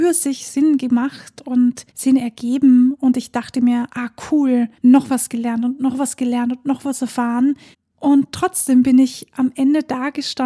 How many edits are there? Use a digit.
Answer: 3